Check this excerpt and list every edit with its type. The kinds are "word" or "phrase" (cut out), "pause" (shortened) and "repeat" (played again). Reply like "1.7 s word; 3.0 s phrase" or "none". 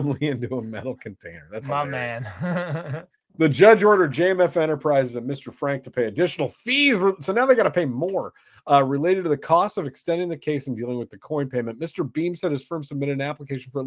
none